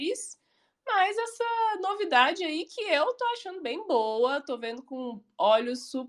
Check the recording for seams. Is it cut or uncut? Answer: uncut